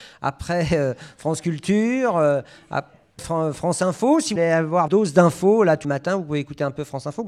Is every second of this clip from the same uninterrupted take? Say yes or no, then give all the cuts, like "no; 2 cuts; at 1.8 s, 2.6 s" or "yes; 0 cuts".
no; 4 cuts; at 3.2 s, 4.4 s, 4.9 s, 5.8 s